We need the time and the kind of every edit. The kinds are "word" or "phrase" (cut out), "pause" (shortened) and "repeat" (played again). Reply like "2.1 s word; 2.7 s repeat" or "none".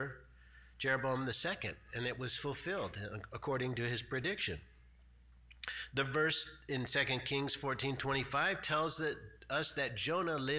none